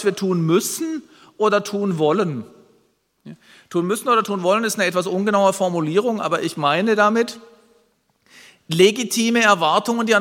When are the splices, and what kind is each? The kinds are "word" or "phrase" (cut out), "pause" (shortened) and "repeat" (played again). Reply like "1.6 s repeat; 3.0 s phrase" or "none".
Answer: none